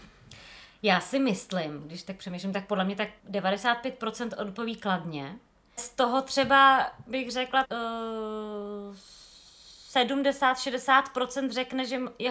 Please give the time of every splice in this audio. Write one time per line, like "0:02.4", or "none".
0:03.2
0:05.8
0:07.6